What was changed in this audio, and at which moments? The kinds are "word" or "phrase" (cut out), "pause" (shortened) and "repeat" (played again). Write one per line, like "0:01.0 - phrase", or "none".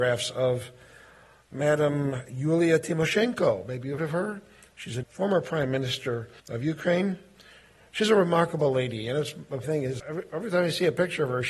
0:04.0 - word
0:05.0 - phrase
0:06.4 - pause
0:09.6 - word
0:10.0 - word